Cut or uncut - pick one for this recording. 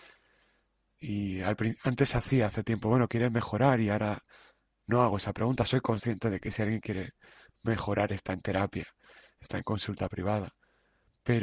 uncut